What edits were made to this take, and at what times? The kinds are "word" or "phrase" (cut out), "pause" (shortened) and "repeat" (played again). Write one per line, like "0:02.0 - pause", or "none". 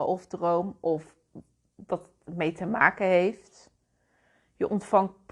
none